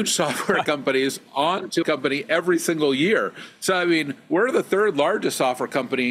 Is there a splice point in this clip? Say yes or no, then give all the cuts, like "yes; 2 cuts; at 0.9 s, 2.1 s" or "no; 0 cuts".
yes; 1 cut; at 1.8 s